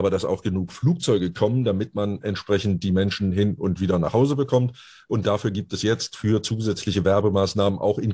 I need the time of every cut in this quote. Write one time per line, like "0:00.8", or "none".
none